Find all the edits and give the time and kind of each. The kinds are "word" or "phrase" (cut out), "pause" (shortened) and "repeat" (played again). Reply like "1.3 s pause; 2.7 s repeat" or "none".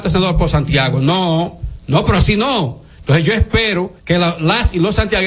4.0 s pause